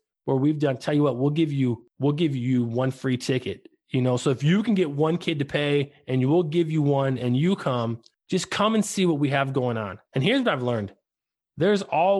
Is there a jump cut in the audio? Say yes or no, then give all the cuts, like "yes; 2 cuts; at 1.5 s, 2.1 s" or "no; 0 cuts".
yes; 1 cut; at 10.1 s